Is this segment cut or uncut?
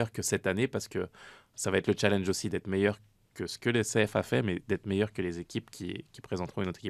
uncut